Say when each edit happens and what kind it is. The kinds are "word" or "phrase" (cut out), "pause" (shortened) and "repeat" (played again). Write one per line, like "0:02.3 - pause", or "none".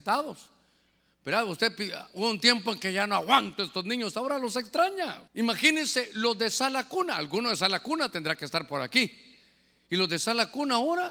0:05.3 - pause